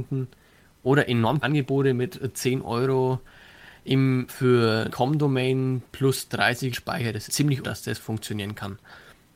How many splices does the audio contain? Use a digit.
6